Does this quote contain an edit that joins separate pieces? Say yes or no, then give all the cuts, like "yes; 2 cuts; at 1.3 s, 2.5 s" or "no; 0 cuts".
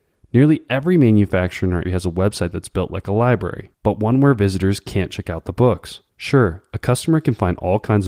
yes; 3 cuts; at 1.8 s, 3.7 s, 6.1 s